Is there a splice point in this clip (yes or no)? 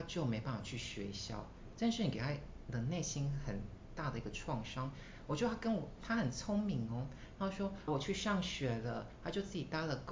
yes